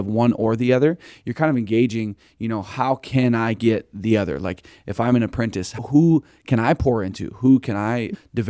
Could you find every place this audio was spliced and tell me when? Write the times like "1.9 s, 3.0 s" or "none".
none